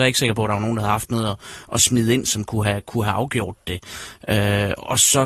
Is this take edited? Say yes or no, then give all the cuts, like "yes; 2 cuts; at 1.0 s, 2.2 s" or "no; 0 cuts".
no; 0 cuts